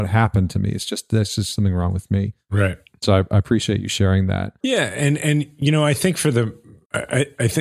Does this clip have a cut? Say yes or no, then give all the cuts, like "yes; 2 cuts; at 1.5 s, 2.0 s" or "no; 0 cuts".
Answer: no; 0 cuts